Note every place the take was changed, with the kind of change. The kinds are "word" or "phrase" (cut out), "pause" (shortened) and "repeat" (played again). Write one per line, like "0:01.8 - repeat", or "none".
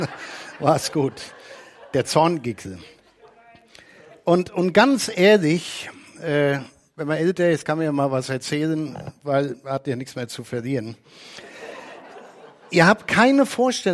none